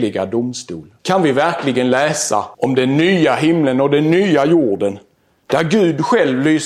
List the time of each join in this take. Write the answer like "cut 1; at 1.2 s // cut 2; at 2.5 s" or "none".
cut 1; at 1.0 s // cut 2; at 2.5 s